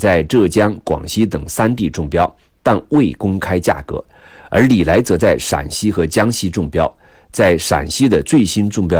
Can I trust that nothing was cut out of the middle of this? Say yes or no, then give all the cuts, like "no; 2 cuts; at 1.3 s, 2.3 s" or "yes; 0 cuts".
yes; 0 cuts